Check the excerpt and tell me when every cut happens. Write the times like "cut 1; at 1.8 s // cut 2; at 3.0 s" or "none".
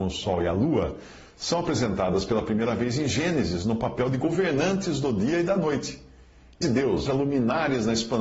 cut 1; at 6.6 s // cut 2; at 7.1 s